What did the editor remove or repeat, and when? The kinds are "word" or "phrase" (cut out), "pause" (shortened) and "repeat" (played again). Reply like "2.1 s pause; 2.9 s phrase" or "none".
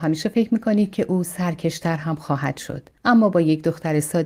3.0 s pause